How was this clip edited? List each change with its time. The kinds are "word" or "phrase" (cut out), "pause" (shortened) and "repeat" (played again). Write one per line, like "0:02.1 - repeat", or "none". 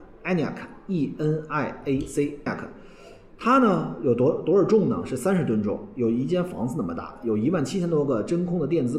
0:02.5 - phrase